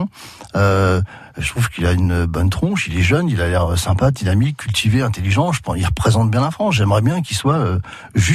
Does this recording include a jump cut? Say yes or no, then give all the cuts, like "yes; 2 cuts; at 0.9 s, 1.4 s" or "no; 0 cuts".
no; 0 cuts